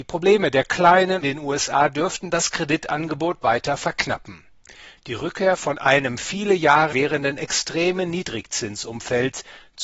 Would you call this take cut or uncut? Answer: cut